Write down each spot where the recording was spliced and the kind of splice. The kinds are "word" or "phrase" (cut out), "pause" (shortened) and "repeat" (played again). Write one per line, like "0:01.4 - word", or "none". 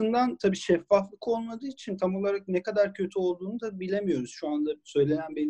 none